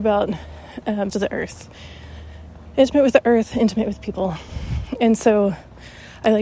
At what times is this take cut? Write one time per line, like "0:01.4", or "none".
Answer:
0:01.1